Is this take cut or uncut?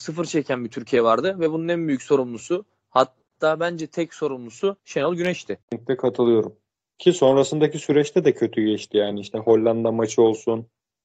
cut